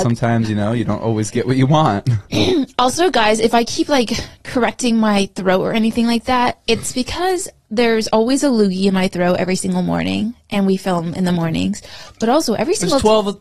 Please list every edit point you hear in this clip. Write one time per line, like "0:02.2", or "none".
none